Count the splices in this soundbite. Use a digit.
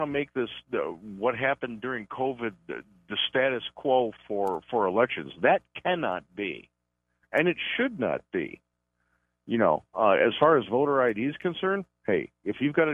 0